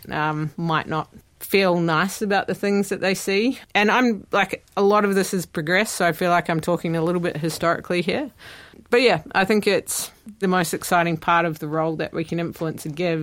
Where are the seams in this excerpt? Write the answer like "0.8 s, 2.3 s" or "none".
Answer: 10.4 s